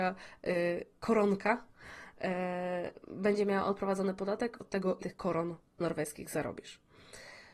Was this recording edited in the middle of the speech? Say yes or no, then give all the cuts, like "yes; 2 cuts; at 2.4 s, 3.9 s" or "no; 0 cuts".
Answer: yes; 3 cuts; at 4.6 s, 5.0 s, 5.7 s